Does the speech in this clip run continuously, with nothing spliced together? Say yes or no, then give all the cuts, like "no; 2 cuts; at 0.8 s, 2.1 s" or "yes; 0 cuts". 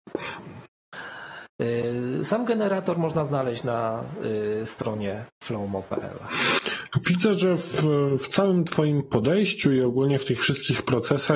yes; 0 cuts